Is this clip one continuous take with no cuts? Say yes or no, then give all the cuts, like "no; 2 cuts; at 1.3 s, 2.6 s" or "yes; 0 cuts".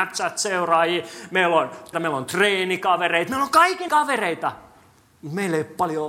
no; 2 cuts; at 1.9 s, 3.9 s